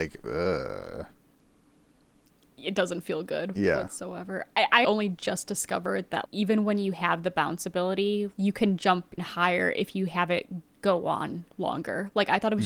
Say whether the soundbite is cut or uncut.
cut